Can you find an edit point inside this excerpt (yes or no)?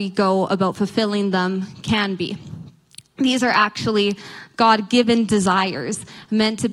no